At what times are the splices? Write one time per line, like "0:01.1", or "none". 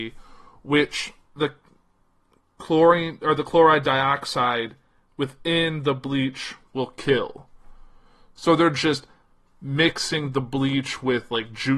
none

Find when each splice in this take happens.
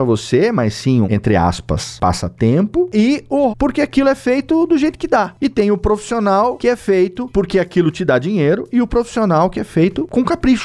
0:01.0
0:03.5

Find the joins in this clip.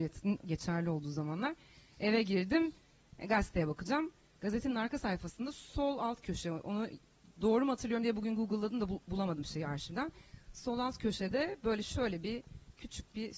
none

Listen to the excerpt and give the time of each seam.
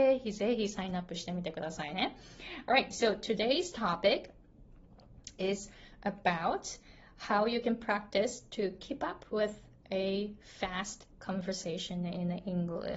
none

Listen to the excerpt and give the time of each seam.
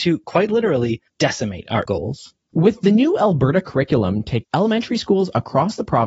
0:01.1
0:01.9
0:04.4

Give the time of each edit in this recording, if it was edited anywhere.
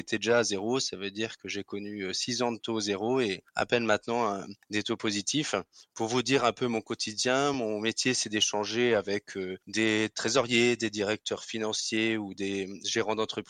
none

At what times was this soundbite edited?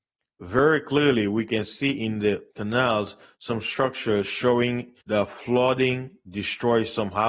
0:02.5
0:05.0

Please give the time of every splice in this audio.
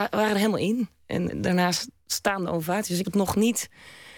0:01.3
0:03.0

